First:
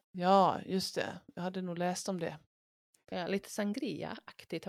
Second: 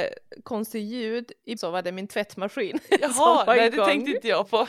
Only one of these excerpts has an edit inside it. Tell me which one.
second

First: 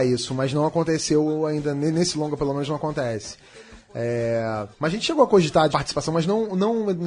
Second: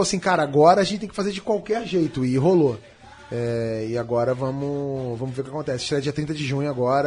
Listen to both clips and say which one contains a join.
first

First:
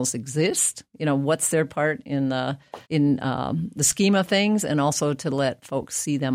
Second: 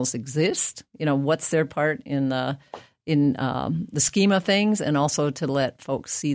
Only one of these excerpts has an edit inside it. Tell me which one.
first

